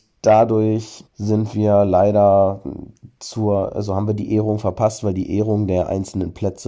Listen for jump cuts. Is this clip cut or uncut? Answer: cut